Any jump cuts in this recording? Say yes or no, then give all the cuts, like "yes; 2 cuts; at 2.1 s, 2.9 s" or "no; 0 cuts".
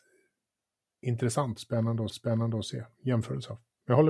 yes; 1 cut; at 2.1 s